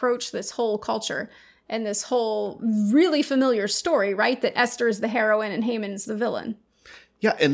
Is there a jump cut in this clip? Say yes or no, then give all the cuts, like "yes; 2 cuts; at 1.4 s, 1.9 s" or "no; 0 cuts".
no; 0 cuts